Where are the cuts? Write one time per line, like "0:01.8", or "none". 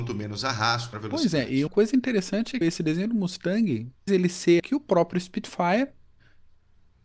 0:00.9
0:01.7
0:02.6
0:04.1
0:04.6

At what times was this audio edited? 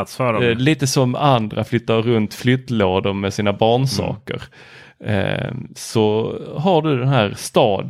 none

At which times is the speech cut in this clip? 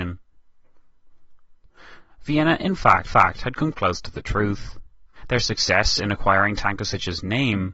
0:03.1

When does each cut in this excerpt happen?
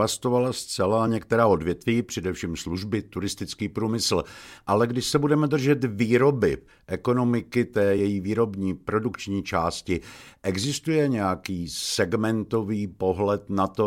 none

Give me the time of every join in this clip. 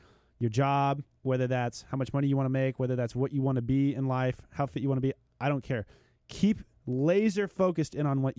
none

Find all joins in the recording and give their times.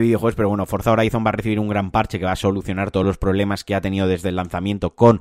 none

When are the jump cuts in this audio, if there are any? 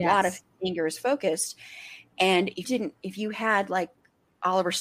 0:02.6

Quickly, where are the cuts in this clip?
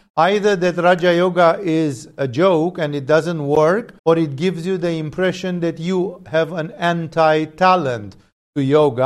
0:04.0

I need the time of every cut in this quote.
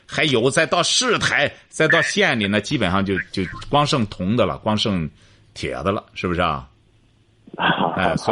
none

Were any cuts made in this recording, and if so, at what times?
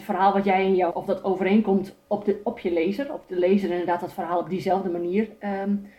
0:00.9

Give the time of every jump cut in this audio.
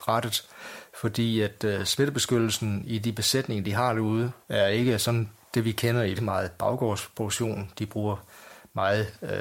0:04.4
0:06.2

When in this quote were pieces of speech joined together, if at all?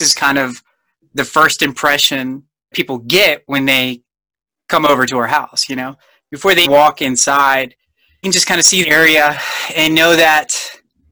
0:02.7
0:06.6
0:08.2
0:08.8

